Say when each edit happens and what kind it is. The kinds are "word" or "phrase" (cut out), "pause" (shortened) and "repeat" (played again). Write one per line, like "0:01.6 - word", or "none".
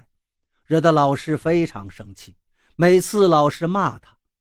0:02.5 - pause